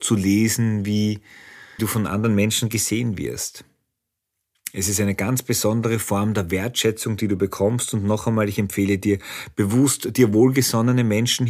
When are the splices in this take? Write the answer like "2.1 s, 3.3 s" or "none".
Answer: 1.8 s